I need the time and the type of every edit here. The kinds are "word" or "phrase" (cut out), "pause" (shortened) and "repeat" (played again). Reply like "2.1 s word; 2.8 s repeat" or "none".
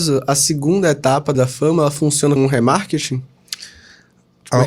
1.3 s word; 2.4 s word